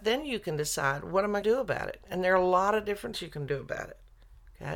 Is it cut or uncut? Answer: cut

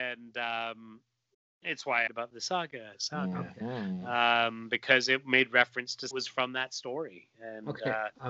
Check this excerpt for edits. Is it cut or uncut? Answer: cut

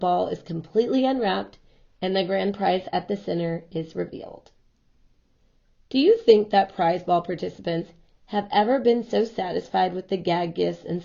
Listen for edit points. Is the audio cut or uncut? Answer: uncut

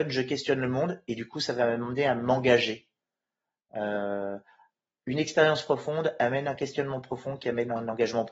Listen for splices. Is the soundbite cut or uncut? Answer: uncut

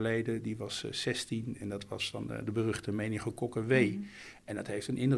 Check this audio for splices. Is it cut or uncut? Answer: uncut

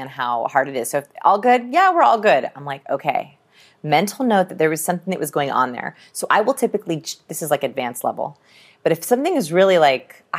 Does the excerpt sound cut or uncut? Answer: uncut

